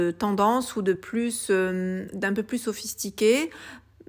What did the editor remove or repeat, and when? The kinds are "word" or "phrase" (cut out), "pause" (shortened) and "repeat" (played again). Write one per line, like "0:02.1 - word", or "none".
none

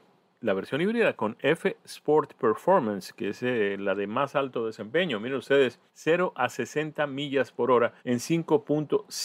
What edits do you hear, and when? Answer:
0:05.9 - pause
0:08.0 - pause

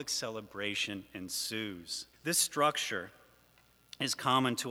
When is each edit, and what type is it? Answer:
0:02.1 - pause

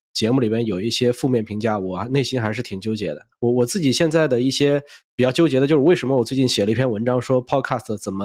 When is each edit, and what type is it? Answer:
none

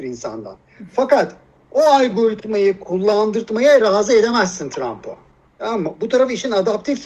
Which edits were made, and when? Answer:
none

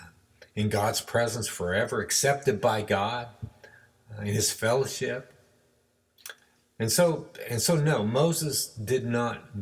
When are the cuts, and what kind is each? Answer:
none

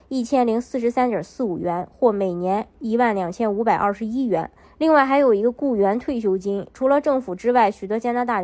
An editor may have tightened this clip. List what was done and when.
0:04.6 - pause

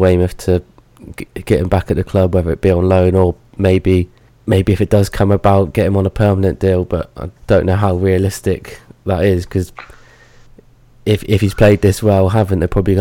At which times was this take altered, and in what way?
0:04.3 - pause
0:07.4 - pause

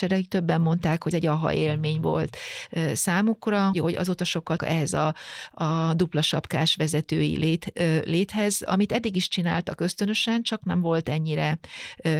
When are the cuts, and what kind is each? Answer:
0:01.1 - word
0:03.7 - word
0:04.6 - phrase

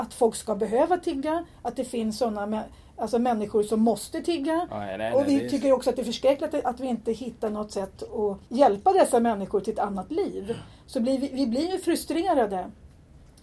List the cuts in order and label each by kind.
0:08.5 - pause

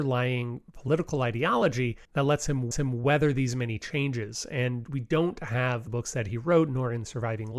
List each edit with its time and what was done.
0:02.0 - pause
0:02.7 - repeat
0:04.8 - word
0:05.9 - phrase

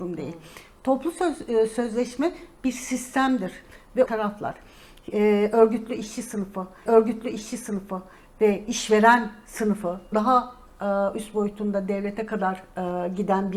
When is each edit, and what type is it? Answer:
0:04.1 - phrase
0:06.9 - repeat
0:10.1 - word

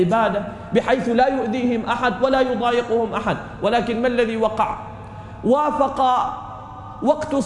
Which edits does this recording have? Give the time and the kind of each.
none

